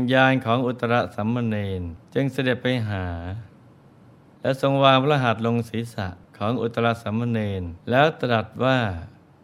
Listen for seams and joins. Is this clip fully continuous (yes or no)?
no